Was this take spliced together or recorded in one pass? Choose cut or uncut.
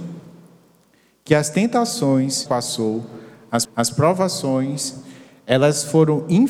cut